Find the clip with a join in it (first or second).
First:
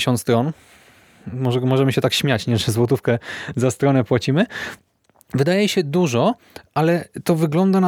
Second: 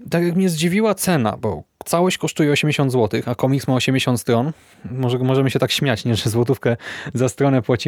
second